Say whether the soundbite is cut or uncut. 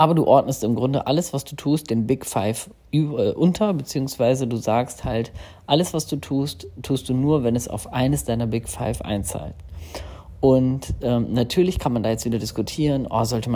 uncut